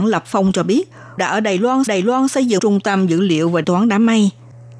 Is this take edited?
yes; 4 cuts; at 1.2 s, 1.9 s, 2.6 s, 3.6 s

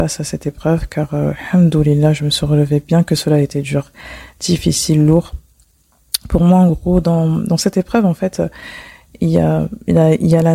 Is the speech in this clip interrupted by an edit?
no; 0 cuts

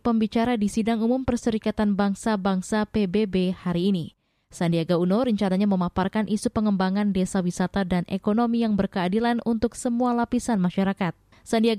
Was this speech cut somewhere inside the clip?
no; 0 cuts

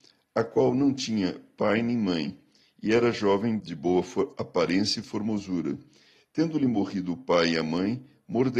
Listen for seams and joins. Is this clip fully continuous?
no; 1 cut; at 3.6 s

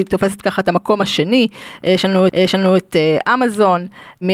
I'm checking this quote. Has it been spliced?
yes; 1 cut; at 2.3 s

